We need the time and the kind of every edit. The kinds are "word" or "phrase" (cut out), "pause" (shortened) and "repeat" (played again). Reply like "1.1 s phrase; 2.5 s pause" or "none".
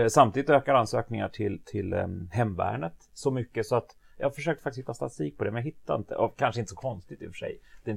none